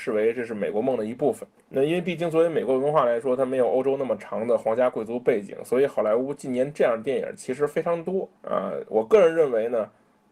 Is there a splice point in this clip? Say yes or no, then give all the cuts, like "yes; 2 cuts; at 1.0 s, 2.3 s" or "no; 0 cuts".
yes; 1 cut; at 1.6 s